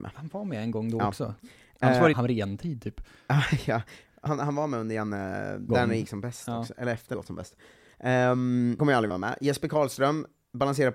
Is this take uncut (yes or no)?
no